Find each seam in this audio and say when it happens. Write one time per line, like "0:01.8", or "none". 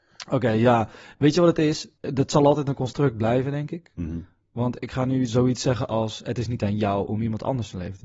none